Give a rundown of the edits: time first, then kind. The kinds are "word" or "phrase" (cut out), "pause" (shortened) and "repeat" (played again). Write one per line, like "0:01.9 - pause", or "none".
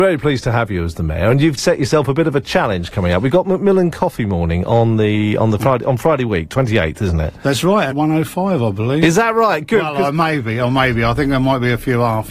0:01.6 - word
0:07.9 - phrase